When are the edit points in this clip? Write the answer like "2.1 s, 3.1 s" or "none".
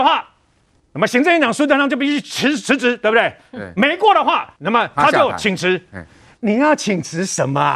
4.6 s